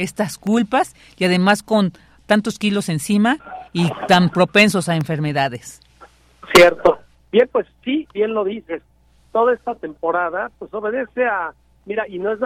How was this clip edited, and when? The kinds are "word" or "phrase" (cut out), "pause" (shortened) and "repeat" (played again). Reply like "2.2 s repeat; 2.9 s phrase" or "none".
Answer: none